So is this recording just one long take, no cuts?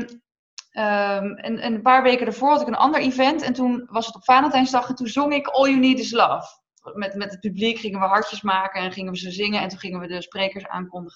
yes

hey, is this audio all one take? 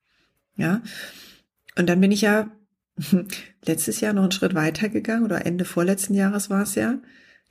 yes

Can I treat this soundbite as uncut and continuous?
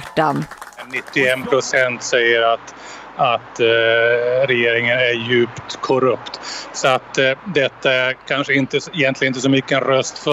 no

